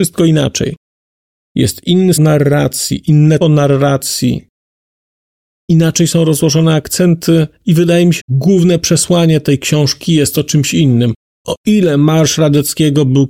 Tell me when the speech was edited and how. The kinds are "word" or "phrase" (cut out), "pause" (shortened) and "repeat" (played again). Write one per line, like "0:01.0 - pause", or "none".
0:02.2 - word
0:03.4 - word
0:08.2 - word